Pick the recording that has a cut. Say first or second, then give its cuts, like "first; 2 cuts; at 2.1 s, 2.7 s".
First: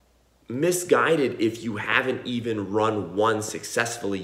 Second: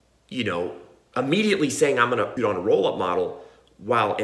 second; 1 cut; at 2.4 s